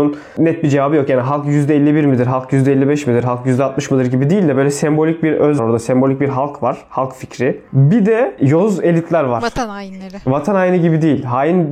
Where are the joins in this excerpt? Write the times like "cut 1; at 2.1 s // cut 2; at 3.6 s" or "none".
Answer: cut 1; at 5.6 s